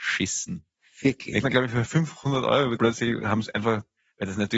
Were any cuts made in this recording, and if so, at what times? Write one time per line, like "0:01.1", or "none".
0:01.4
0:02.8
0:03.5